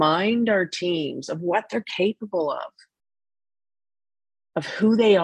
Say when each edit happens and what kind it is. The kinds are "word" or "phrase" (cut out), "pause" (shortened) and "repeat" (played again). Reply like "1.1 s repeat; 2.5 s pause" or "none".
none